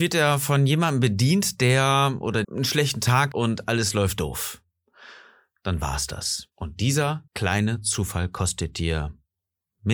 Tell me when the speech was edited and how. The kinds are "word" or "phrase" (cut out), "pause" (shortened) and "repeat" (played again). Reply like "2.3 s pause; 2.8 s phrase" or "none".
2.4 s word; 3.3 s word; 6.5 s pause; 7.3 s pause